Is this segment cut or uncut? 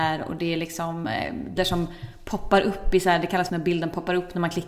cut